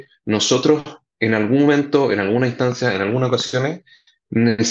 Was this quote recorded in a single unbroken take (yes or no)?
yes